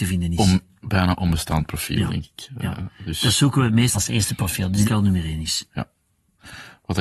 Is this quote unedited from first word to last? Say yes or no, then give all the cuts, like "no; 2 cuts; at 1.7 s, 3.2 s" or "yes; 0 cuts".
no; 2 cuts; at 3.9 s, 4.8 s